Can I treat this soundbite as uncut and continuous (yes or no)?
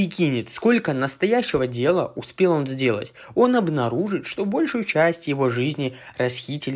yes